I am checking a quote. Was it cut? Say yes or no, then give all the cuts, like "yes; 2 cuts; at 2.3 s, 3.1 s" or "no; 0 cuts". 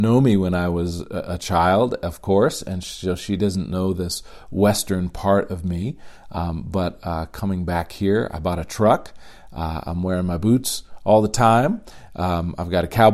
no; 0 cuts